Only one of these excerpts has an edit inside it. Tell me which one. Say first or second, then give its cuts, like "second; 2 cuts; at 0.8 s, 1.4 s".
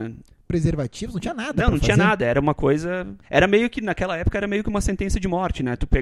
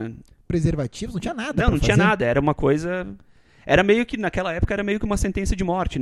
first; 1 cut; at 3.2 s